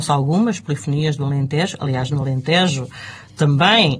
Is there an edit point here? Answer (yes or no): no